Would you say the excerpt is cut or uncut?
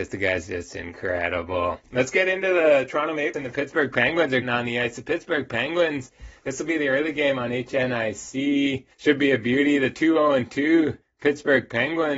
cut